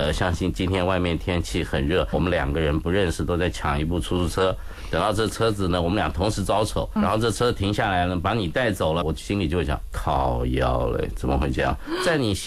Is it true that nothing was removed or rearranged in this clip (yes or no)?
no